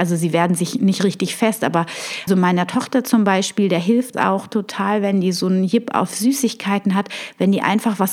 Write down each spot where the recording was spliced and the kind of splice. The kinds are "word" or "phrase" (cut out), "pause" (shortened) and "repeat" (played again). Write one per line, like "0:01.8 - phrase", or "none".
0:02.3 - word
0:04.1 - word